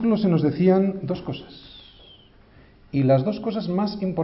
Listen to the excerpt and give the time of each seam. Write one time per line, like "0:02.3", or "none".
none